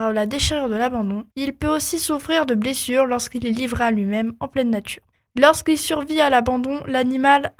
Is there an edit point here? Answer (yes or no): yes